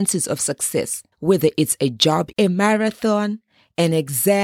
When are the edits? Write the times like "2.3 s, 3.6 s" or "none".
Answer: 1.1 s, 2.3 s